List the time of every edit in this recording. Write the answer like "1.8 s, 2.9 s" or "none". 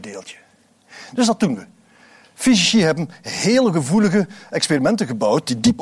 none